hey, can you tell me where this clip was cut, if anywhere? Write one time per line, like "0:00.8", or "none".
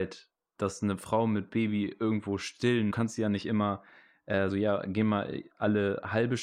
0:02.9
0:04.5